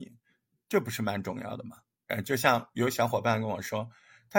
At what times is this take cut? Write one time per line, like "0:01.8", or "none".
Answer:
0:01.9